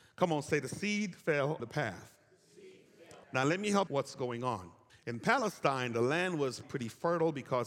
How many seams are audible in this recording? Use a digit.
5